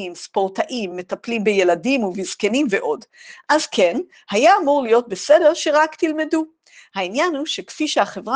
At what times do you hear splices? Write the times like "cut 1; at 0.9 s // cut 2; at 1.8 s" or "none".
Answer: none